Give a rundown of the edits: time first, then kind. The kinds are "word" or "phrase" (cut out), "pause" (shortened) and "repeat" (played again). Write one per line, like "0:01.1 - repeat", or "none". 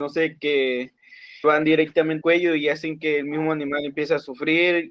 0:01.4 - word
0:02.2 - word